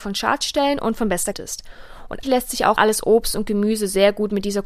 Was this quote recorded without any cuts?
no; 3 cuts; at 1.3 s, 2.2 s, 2.8 s

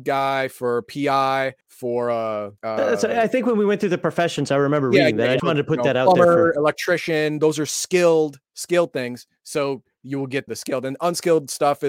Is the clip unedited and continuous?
no; 5 cuts; at 1.6 s, 2.6 s, 5.4 s, 8.4 s, 10.5 s

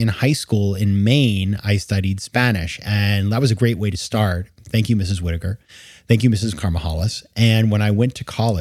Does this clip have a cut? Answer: no; 0 cuts

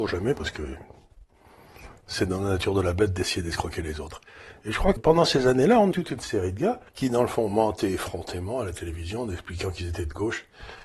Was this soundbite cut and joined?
yes; 3 cuts; at 5.0 s, 5.9 s, 6.9 s

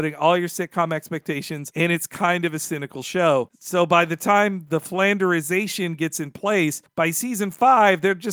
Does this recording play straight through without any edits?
yes; 0 cuts

